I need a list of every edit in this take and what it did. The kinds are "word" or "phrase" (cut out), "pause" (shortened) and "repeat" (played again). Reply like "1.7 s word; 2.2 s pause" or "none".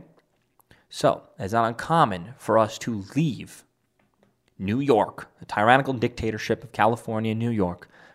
none